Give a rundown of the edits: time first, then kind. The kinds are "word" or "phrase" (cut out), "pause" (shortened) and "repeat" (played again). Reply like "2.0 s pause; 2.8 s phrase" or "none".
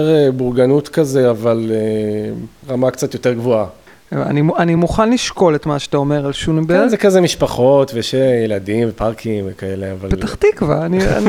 none